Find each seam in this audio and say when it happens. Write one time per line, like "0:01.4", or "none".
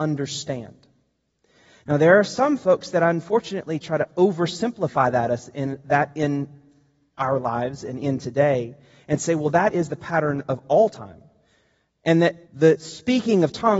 0:12.4